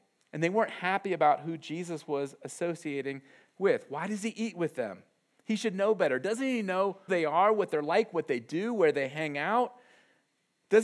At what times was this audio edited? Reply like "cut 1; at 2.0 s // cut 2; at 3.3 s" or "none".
cut 1; at 7.1 s